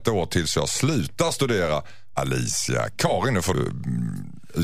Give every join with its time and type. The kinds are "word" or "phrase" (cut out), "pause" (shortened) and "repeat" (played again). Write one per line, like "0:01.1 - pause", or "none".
0:02.1 - word
0:03.5 - word